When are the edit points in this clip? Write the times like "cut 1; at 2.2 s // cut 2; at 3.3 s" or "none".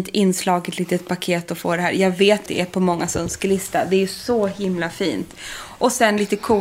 cut 1; at 2.5 s